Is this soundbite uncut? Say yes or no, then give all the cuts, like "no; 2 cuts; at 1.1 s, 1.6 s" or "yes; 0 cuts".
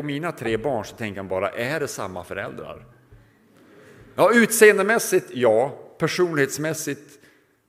yes; 0 cuts